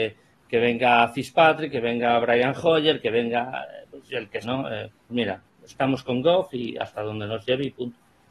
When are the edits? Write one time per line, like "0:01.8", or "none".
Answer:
0:04.4
0:05.1